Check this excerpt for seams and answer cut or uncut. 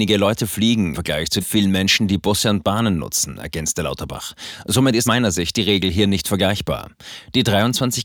cut